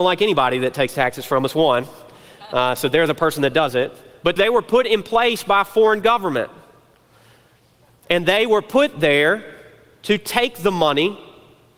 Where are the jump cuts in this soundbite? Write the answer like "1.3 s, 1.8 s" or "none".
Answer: 4.4 s